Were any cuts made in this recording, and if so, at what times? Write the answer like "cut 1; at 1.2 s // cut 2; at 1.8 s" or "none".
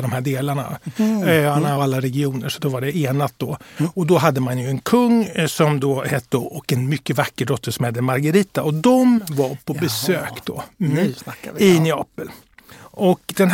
cut 1; at 1.8 s // cut 2; at 6.3 s